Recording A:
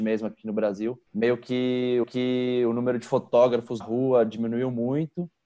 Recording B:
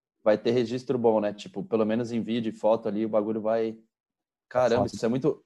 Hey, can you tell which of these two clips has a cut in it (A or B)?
A